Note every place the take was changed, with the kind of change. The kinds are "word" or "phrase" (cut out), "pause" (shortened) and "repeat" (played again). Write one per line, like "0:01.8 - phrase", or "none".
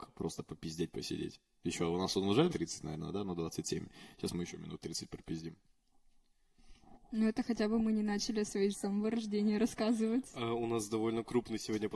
0:02.5 - word
0:08.7 - word